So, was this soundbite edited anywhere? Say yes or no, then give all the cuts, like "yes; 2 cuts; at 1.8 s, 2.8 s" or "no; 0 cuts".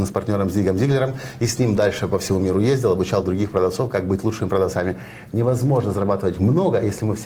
no; 0 cuts